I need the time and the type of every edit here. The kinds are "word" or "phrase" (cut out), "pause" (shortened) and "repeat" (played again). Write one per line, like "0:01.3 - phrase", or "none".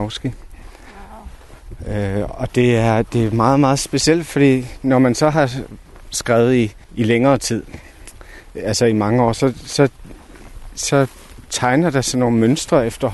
0:06.8 - pause